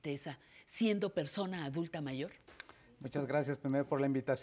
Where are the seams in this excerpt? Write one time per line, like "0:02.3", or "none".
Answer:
none